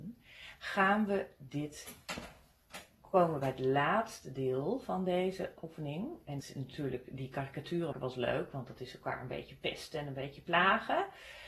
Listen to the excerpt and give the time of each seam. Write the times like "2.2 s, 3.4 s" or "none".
6.4 s, 7.9 s